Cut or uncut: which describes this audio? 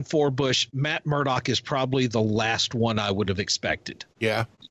uncut